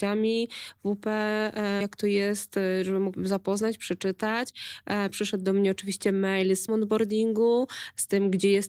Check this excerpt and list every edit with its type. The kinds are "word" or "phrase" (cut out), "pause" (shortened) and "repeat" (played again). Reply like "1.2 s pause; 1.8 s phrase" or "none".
1.8 s word; 3.1 s word; 6.7 s word

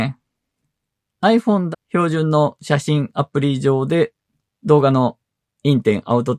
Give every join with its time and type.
1.7 s phrase

